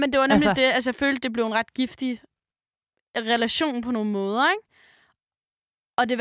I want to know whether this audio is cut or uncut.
uncut